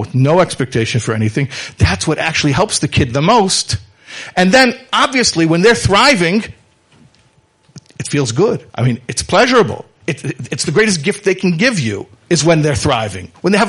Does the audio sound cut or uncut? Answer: cut